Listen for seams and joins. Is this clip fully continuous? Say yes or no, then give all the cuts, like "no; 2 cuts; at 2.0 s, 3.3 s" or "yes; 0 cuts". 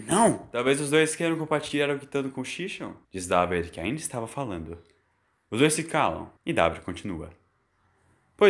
no; 2 cuts; at 3.0 s, 6.4 s